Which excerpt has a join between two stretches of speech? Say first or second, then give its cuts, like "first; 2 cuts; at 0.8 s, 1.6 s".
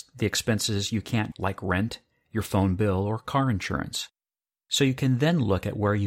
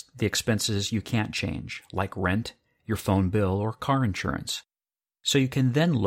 first; 1 cut; at 1.3 s